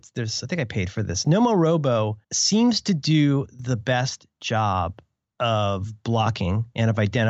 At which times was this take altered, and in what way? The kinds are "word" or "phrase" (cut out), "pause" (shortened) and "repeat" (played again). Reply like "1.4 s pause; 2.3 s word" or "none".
2.2 s pause; 5.2 s pause